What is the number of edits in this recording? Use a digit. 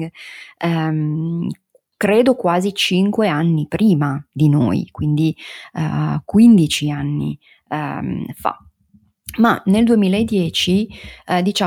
0